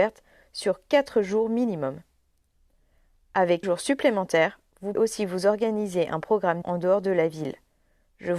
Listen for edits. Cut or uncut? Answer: cut